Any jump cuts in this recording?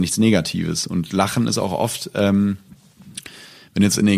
no; 0 cuts

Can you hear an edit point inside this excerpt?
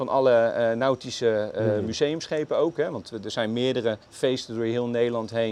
yes; 1 cut; at 4.0 s

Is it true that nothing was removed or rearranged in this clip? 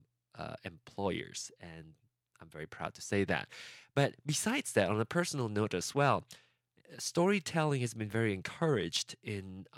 yes; 0 cuts

